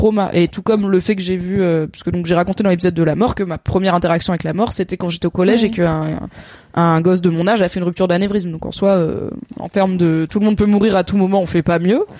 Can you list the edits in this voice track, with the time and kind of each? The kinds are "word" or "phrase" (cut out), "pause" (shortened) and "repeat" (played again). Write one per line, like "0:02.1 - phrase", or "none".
none